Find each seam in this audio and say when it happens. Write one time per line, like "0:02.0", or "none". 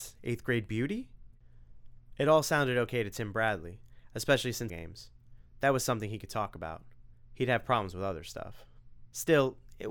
0:04.7